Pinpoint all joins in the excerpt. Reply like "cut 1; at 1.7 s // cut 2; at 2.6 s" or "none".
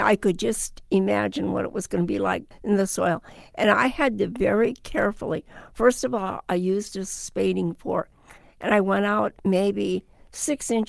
none